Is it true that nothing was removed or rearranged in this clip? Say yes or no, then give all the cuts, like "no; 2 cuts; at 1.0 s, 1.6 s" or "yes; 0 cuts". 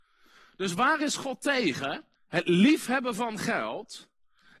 no; 1 cut; at 2.1 s